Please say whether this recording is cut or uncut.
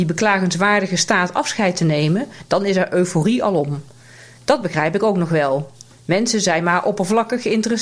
uncut